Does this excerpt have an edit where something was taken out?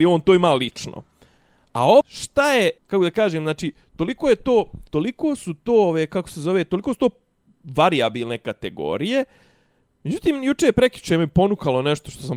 yes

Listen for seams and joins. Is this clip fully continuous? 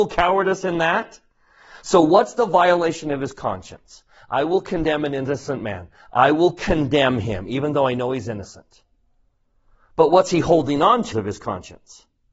no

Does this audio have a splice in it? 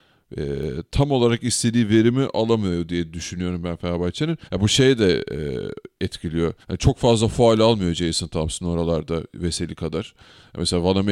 yes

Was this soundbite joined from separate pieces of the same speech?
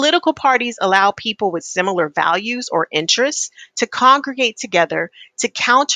no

